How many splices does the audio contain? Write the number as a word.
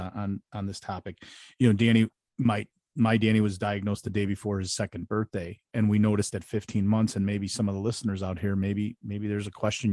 zero